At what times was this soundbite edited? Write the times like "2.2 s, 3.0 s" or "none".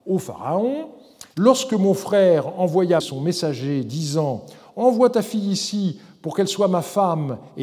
1.3 s, 3.0 s